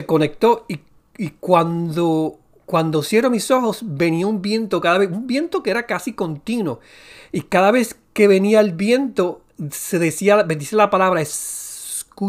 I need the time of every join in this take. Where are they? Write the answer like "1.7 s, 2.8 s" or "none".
none